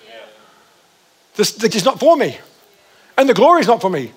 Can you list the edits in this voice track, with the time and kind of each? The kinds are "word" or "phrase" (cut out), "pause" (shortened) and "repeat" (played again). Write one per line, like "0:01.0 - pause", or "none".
0:01.7 - word